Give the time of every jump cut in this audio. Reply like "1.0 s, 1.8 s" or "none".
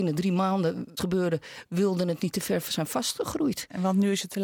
1.0 s

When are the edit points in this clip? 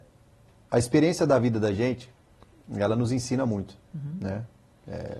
none

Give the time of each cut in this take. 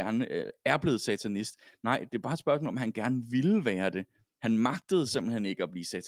none

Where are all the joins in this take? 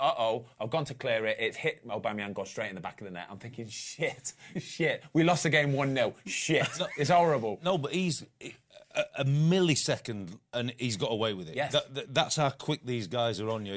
10.5 s

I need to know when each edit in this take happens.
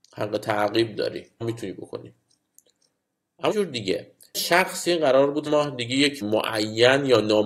1.4 s, 3.5 s, 4.3 s, 5.5 s, 6.2 s

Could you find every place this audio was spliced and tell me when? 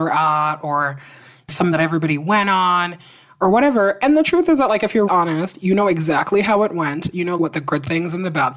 1.7 s, 5.1 s, 7.4 s

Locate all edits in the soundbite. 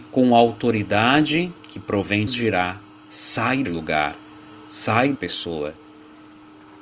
1.6 s, 2.3 s, 3.6 s, 5.1 s

